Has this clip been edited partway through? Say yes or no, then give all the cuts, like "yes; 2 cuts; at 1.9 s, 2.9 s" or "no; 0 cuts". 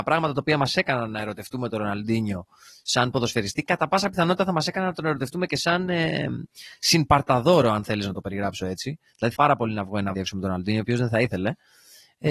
yes; 2 cuts; at 9.4 s, 10.1 s